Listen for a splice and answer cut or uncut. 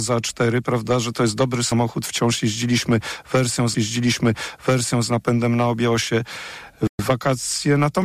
cut